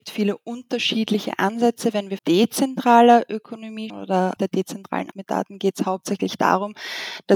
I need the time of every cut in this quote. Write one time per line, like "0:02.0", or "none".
0:02.2
0:03.9
0:04.4
0:05.1